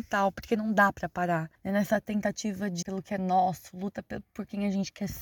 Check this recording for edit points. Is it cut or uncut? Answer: cut